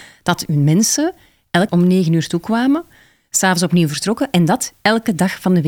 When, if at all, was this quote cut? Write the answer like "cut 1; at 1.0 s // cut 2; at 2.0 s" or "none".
cut 1; at 1.7 s